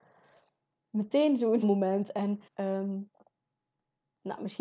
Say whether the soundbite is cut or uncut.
cut